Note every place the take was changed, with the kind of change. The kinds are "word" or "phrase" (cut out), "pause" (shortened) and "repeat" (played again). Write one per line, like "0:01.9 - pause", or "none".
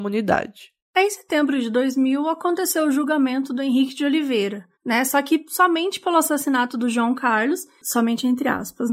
0:04.7 - pause

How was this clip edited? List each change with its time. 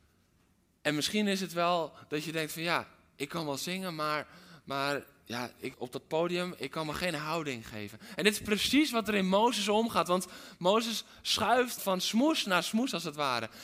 0:05.7 - word
0:11.8 - word

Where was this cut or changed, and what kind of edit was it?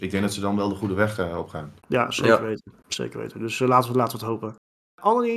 0:01.8 - pause
0:02.8 - pause

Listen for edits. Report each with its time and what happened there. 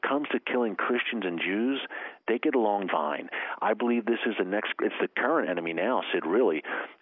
0:02.9 - word

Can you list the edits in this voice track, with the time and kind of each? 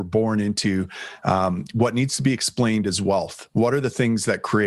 none

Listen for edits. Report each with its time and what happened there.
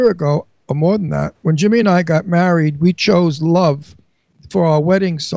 none

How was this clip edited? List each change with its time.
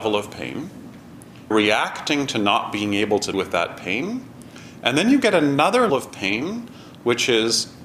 0:01.5 - word
0:03.3 - word
0:05.9 - word

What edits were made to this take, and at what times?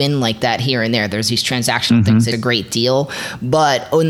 0:02.3 - word

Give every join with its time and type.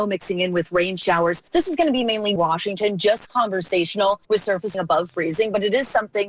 0:01.5 - pause
0:02.4 - phrase
0:04.2 - pause
0:04.7 - phrase

